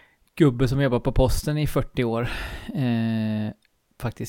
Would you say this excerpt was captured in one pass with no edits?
yes; 0 cuts

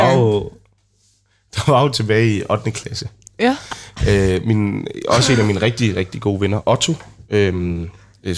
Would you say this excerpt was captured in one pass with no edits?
yes; 0 cuts

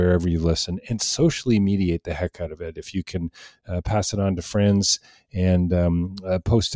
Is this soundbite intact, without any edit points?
yes; 0 cuts

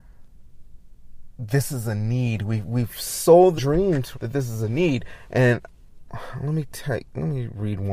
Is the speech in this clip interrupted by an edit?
yes; 2 cuts; at 3.6 s, 4.1 s

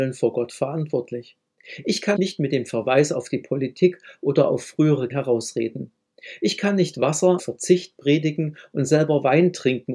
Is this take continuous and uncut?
no; 3 cuts; at 2.2 s, 5.1 s, 7.4 s

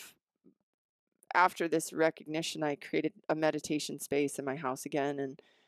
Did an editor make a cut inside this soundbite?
no; 0 cuts

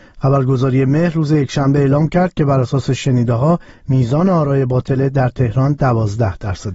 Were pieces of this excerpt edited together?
no; 0 cuts

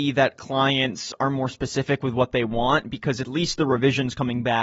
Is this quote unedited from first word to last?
yes; 0 cuts

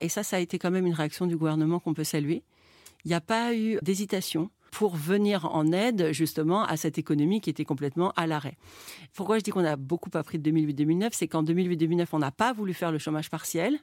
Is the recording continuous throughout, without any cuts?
no; 2 cuts; at 3.8 s, 4.7 s

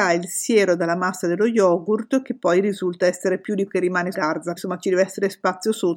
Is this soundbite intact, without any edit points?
no; 3 cuts; at 3.7 s, 4.1 s, 4.6 s

